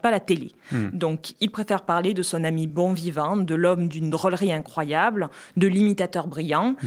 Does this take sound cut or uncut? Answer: uncut